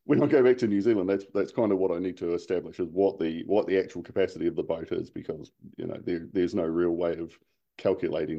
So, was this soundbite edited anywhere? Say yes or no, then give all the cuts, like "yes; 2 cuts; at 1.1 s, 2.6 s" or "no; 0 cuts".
no; 0 cuts